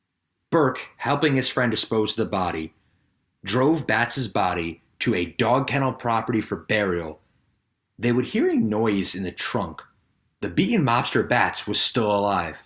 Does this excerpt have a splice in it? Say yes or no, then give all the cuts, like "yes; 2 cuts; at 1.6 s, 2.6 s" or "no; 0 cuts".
no; 0 cuts